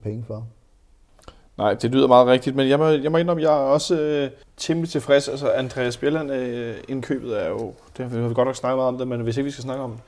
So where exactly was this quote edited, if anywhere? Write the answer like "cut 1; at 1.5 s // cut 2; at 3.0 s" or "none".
cut 1; at 4.4 s